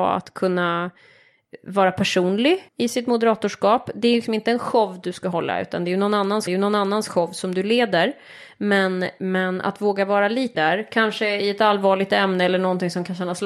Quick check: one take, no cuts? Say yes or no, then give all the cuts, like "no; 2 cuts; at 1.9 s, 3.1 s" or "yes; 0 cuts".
no; 3 cuts; at 2.7 s, 6.5 s, 10.5 s